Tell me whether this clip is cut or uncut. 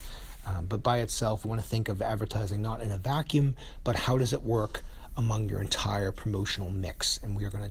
cut